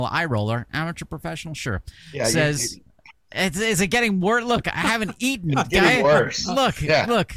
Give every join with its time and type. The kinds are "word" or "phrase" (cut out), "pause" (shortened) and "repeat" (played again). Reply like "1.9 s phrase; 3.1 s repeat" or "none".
none